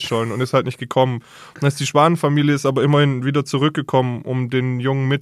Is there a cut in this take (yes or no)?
no